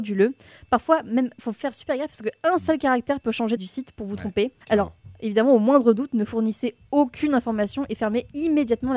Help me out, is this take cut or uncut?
cut